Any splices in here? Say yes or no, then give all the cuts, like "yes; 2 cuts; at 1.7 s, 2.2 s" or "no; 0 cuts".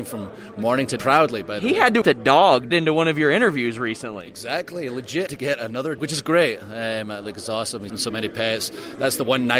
yes; 6 cuts; at 1.0 s, 2.0 s, 2.7 s, 5.3 s, 6.0 s, 7.9 s